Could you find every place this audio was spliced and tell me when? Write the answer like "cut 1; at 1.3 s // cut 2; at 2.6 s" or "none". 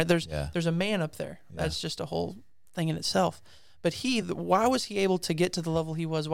none